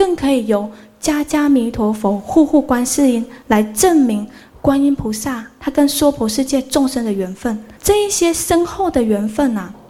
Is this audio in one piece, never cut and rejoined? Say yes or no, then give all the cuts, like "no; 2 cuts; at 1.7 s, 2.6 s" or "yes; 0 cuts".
no; 1 cut; at 7.8 s